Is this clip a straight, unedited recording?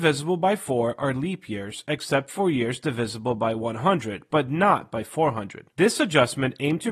yes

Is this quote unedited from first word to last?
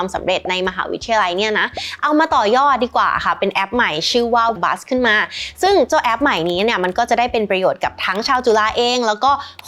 no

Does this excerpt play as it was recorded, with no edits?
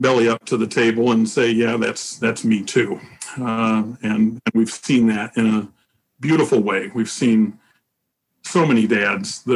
yes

